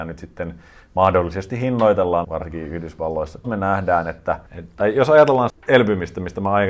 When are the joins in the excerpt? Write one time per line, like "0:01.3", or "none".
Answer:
0:02.2
0:03.4
0:04.5
0:05.5